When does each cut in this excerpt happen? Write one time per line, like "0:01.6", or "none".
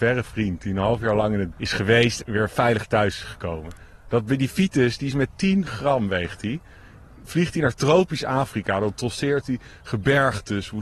0:01.5
0:02.2